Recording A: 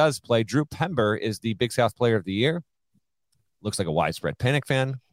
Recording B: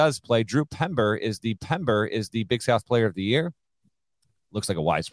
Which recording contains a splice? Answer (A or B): B